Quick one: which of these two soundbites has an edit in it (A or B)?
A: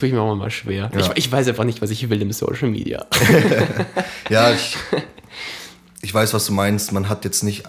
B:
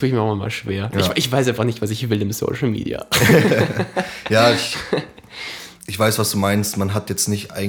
B